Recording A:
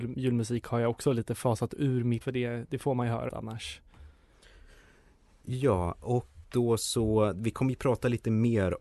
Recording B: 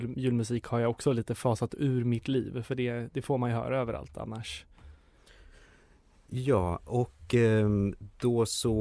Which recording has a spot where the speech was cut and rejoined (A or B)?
A